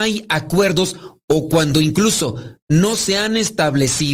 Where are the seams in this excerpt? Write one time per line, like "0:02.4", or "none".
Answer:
none